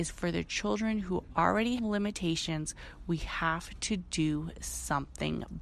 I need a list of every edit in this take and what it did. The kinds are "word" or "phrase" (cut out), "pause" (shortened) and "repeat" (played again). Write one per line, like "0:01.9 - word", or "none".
0:01.8 - word